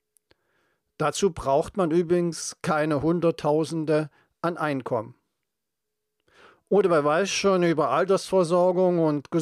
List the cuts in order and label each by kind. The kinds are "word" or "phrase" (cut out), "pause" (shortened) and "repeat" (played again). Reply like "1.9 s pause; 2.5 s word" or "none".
none